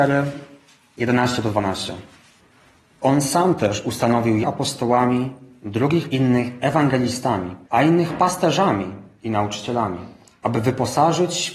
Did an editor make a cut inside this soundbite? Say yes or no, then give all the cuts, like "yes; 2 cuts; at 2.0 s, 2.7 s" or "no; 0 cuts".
yes; 3 cuts; at 4.4 s, 6.1 s, 7.6 s